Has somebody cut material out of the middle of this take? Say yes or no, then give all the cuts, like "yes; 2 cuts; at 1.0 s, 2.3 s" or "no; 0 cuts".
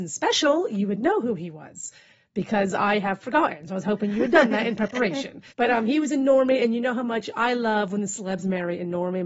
yes; 1 cut; at 5.5 s